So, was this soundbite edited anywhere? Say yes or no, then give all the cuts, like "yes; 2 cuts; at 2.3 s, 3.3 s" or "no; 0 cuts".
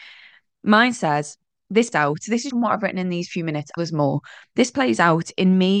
yes; 3 cuts; at 1.9 s, 2.5 s, 3.8 s